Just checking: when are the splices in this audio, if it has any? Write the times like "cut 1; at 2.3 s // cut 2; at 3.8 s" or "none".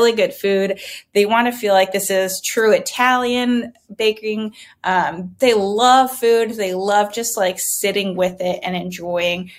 none